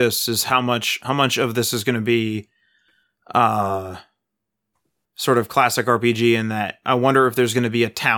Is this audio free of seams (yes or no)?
yes